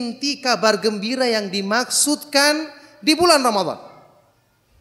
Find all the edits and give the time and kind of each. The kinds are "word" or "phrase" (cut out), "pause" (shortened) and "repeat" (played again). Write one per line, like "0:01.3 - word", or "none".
none